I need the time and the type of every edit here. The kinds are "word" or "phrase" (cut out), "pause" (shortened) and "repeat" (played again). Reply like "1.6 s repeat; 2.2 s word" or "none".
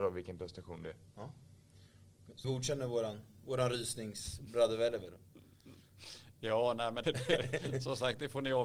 2.4 s word; 7.0 s word